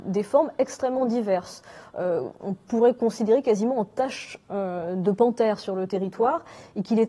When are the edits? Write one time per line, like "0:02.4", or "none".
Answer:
none